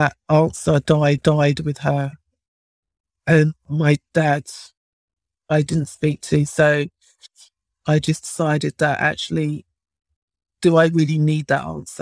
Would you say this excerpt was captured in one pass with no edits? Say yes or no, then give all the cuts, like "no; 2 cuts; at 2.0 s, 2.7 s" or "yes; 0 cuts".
no; 1 cut; at 1.2 s